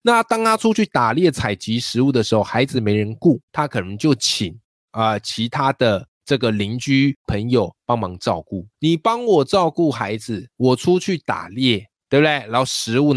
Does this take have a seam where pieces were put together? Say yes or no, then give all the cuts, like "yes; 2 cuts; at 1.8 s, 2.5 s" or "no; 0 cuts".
yes; 3 cuts; at 3.4 s, 6.1 s, 8.7 s